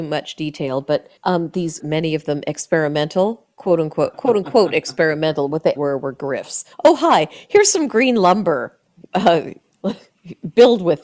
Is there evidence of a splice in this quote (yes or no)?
yes